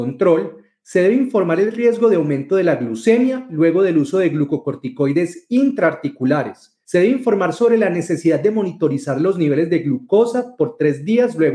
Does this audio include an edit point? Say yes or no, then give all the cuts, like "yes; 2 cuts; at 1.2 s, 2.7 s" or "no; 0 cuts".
no; 0 cuts